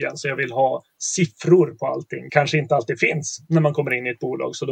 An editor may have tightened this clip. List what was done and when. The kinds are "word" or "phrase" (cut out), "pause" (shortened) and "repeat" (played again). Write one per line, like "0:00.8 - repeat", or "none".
0:02.3 - word